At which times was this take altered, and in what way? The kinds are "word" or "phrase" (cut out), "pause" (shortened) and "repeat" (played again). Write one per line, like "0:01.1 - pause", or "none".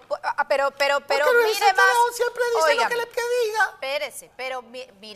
0:03.1 - word